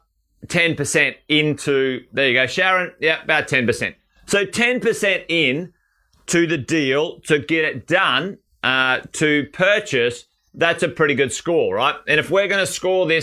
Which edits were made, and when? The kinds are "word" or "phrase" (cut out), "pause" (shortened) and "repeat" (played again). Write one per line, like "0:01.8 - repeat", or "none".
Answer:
none